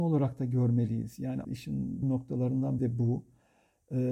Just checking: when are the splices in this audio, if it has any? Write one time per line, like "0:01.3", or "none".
0:01.4
0:02.0
0:02.8